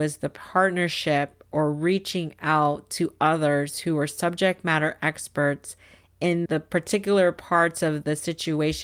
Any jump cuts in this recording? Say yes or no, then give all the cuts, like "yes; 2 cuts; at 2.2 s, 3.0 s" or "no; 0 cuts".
yes; 1 cut; at 6.5 s